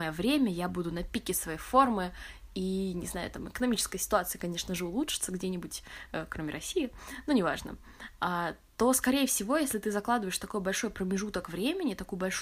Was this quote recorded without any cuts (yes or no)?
yes